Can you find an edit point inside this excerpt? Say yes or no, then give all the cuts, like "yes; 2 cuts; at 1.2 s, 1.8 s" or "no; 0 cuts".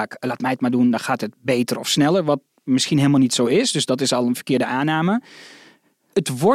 no; 0 cuts